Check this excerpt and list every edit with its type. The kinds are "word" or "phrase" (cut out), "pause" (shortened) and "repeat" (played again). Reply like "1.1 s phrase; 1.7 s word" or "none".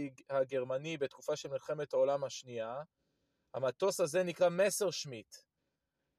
none